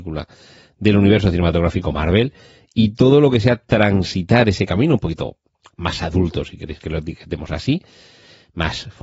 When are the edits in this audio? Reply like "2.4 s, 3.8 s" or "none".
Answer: none